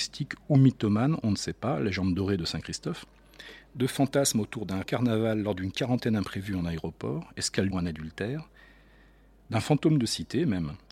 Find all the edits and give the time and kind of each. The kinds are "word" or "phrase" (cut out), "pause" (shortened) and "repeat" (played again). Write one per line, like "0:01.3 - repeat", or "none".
0:04.8 - word
0:07.7 - phrase

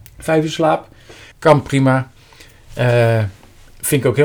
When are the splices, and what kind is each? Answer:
0:01.3 - pause

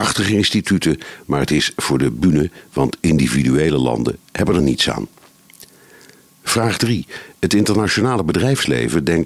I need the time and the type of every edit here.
none

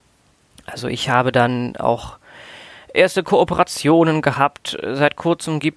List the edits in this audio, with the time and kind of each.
none

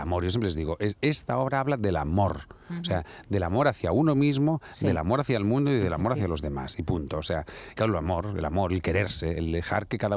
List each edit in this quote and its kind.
0:07.8 - phrase

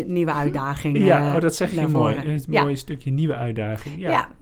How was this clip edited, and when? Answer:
none

